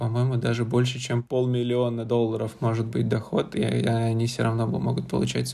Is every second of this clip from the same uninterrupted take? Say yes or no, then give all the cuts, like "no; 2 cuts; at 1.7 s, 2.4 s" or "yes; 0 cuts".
yes; 0 cuts